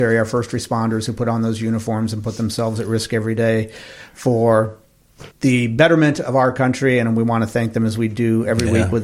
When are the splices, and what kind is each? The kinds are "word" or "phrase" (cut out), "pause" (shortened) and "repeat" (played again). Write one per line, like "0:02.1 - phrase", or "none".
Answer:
0:05.3 - pause